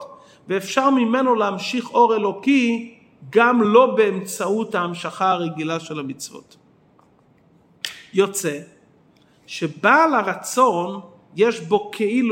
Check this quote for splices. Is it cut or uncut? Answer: uncut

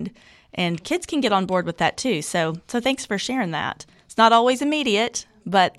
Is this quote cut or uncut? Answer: uncut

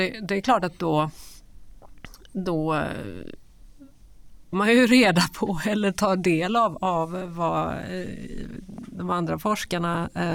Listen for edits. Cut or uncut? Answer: cut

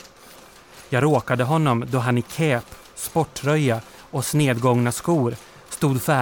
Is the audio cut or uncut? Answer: uncut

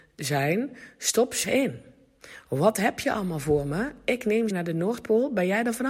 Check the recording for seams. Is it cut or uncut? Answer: cut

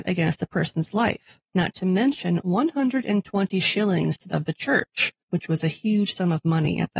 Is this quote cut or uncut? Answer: cut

